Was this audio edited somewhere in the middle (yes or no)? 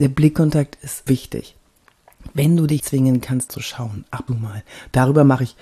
yes